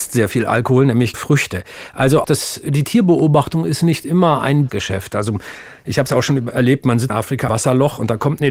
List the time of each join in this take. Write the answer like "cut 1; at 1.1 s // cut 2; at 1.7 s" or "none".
cut 1; at 1.1 s // cut 2; at 2.2 s // cut 3; at 4.7 s // cut 4; at 6.5 s // cut 5; at 7.1 s // cut 6; at 7.5 s